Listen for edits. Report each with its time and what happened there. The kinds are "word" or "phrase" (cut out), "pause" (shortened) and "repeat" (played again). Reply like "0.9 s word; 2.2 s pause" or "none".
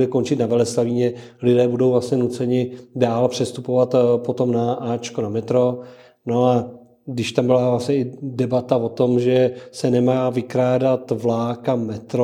none